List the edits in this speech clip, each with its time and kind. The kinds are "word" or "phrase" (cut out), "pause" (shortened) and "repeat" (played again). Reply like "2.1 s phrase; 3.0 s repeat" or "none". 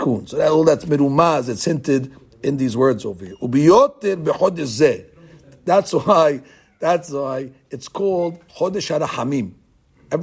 8.5 s word